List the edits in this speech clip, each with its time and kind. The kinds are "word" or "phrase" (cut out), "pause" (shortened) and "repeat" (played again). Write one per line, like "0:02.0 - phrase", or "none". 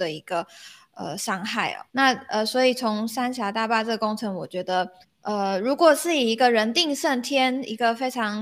0:01.9 - pause
0:05.0 - pause